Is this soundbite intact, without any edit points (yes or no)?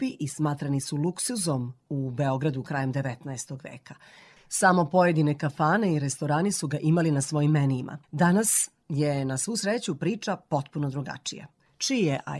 no